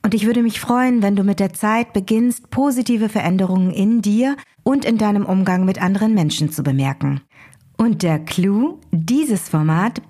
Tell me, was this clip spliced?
no; 0 cuts

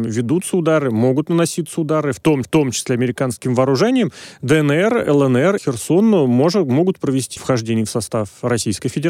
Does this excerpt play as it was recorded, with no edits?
no; 3 cuts; at 2.4 s, 5.6 s, 7.4 s

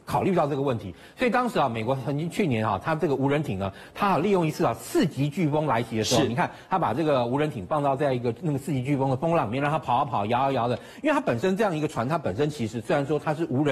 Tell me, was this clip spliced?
no; 0 cuts

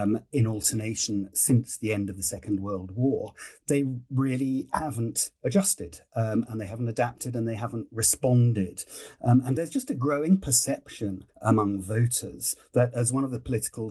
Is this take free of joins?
no; 2 cuts; at 9.6 s, 11.3 s

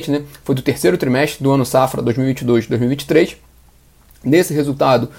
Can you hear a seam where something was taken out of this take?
no; 0 cuts

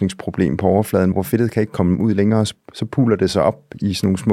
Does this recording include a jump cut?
yes; 1 cut; at 1.1 s

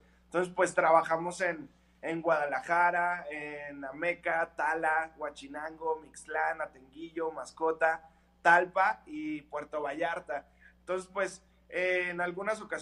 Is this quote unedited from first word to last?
yes; 0 cuts

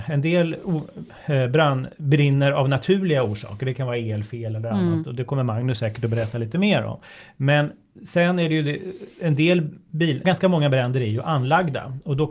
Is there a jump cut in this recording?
yes; 1 cut; at 10.2 s

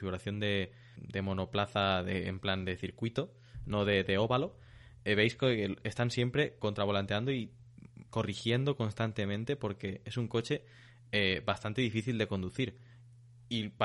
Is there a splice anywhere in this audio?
yes; 2 cuts; at 1.0 s, 8.1 s

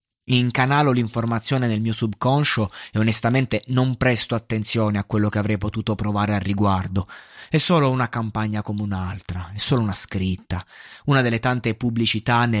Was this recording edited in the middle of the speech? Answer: no; 0 cuts

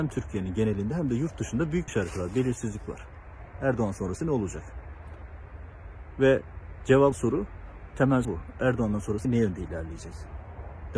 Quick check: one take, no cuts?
no; 4 cuts; at 1.9 s, 7.1 s, 8.2 s, 9.2 s

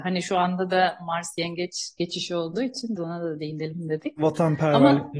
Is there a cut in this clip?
yes; 1 cut; at 3.0 s

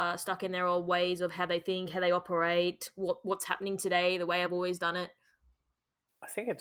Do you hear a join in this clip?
no; 0 cuts

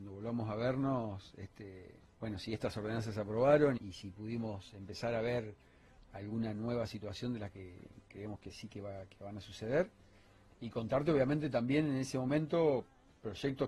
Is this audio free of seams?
no; 2 cuts; at 2.0 s, 3.8 s

